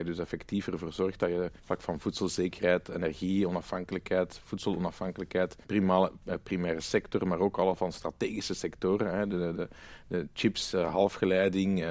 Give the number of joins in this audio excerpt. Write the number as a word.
two